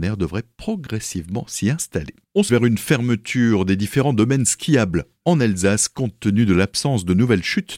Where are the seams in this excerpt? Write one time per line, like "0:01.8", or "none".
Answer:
0:02.5